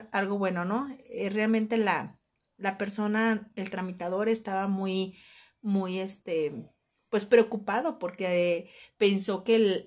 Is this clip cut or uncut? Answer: uncut